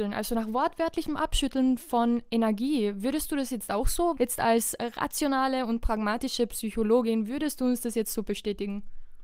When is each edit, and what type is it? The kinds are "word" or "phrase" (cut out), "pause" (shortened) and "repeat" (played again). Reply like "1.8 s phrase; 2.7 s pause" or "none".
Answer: 4.1 s word